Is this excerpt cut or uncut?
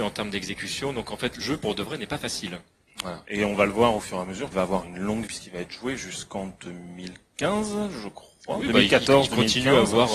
cut